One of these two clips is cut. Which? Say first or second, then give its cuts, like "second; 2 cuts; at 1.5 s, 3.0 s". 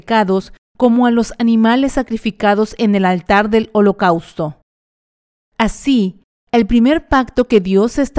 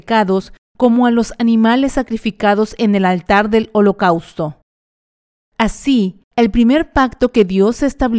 second; 1 cut; at 6.2 s